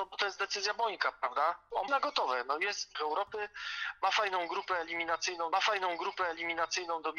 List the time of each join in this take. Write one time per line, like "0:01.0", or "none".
0:01.9
0:02.9
0:05.5